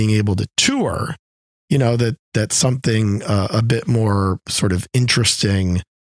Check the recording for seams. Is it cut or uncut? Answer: cut